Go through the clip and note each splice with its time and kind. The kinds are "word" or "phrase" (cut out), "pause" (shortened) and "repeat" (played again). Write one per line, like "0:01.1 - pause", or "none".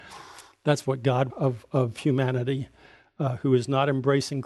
0:01.3 - phrase